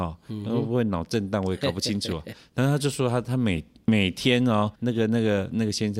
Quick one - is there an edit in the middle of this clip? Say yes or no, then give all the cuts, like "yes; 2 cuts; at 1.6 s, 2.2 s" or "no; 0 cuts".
yes; 1 cut; at 4.7 s